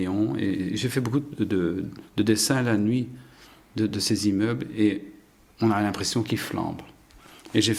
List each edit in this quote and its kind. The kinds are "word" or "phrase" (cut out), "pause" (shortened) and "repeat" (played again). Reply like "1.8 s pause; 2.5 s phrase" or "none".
none

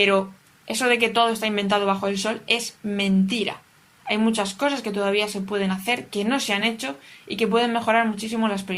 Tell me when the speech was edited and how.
none

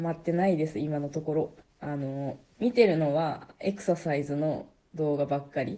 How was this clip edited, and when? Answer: 1.6 s pause

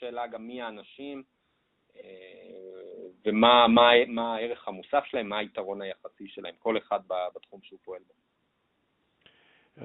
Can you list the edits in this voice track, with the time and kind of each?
none

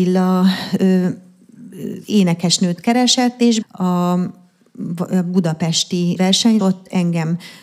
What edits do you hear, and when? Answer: 3.6 s word; 6.2 s word; 6.6 s word

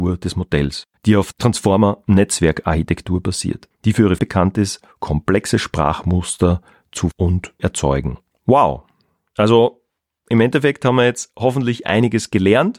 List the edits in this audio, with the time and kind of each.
1.3 s word; 4.2 s word; 7.1 s word; 7.6 s word

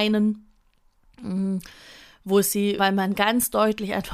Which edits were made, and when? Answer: 2.8 s phrase

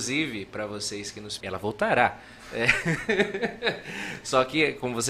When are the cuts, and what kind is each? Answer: 1.4 s word

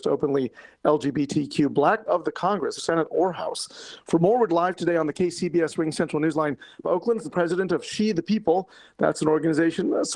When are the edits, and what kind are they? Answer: 2.1 s phrase; 2.8 s word; 4.5 s word; 6.8 s phrase; 7.2 s word

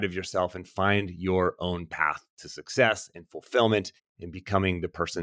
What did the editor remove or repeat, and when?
4.0 s pause

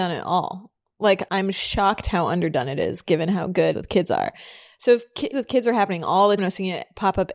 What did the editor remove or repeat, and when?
3.7 s word; 5.3 s word; 6.4 s word

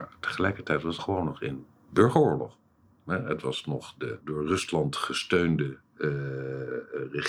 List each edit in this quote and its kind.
1.0 s word

